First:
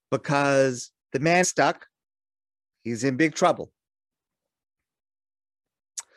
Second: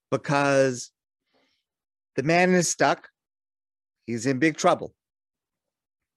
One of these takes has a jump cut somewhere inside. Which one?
first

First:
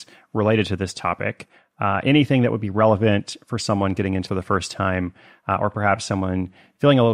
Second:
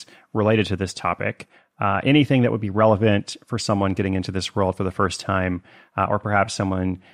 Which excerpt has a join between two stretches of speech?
first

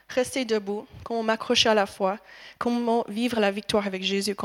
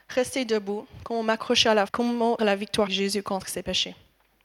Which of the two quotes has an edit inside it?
second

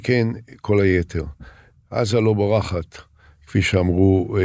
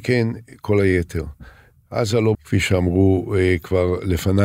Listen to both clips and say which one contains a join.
second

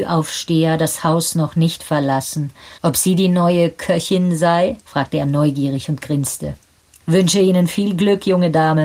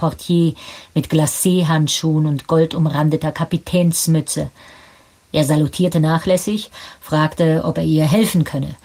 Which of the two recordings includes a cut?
first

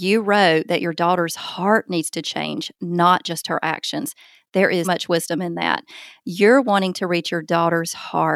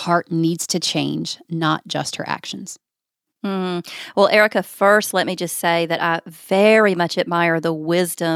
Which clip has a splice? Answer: first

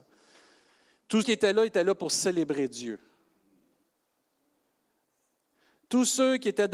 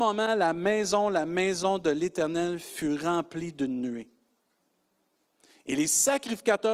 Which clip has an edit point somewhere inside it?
first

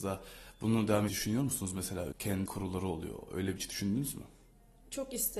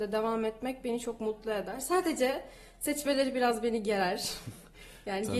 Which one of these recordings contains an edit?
first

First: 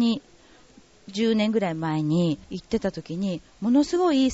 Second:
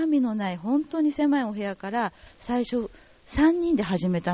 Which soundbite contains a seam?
first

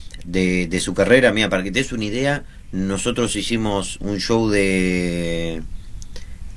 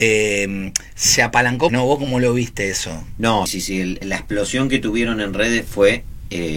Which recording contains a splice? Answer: second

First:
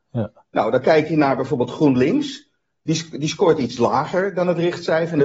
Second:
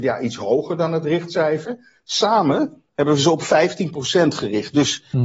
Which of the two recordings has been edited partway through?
second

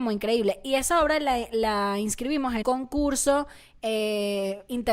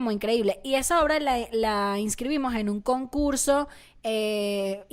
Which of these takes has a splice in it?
first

